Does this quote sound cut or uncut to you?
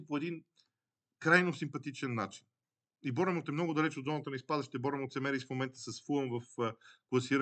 uncut